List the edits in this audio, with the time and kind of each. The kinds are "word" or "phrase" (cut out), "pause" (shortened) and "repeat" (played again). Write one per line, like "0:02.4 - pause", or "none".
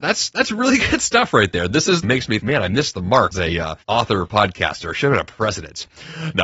0:02.0 - phrase
0:02.4 - word
0:03.3 - word
0:03.8 - pause